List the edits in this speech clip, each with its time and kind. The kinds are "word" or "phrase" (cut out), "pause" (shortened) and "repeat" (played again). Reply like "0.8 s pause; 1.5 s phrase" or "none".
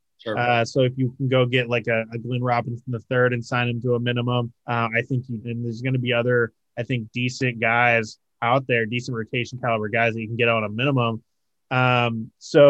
4.6 s pause; 5.4 s phrase